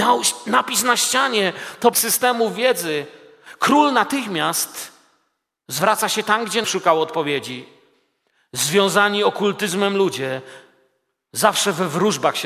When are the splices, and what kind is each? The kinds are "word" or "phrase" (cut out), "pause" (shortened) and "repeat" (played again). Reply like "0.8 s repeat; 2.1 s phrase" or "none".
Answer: 1.9 s phrase; 6.6 s word